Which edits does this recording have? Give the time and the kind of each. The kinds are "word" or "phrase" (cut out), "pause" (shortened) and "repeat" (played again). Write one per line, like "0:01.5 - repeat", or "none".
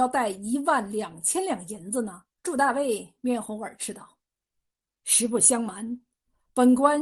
0:02.4 - pause
0:04.2 - pause

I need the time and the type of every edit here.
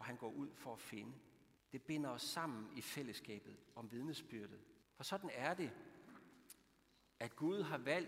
0:01.6 - pause
0:04.8 - pause

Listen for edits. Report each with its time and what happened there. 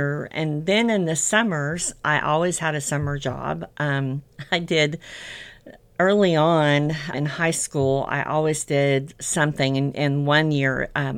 0:07.1 - word

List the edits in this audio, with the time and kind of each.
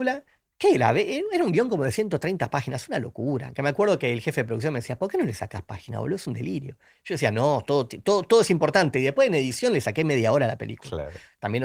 none

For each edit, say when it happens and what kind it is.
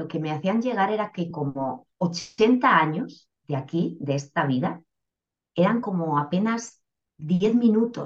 none

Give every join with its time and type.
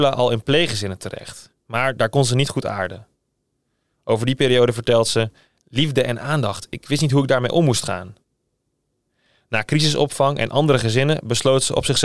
none

